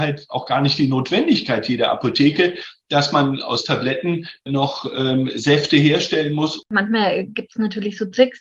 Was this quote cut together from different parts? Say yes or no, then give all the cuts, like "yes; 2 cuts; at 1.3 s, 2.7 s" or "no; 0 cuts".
no; 0 cuts